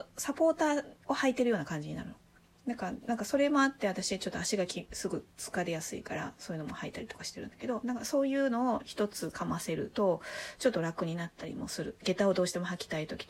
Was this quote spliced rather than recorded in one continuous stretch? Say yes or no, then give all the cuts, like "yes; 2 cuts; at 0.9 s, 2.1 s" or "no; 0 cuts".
no; 0 cuts